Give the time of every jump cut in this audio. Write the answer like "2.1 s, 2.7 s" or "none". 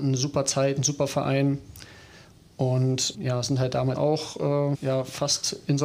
3.1 s, 3.9 s, 4.7 s